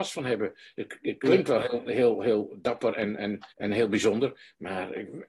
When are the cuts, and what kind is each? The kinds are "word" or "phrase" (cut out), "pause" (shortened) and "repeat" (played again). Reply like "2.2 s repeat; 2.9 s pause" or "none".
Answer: 3.5 s pause